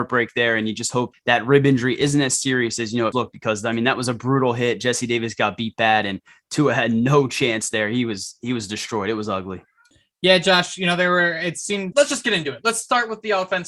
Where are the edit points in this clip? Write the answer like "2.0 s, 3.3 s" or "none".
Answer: 1.1 s, 3.1 s, 11.9 s